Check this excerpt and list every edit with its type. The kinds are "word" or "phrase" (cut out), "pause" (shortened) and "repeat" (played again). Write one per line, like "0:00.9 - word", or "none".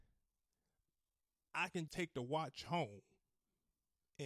0:01.9 - word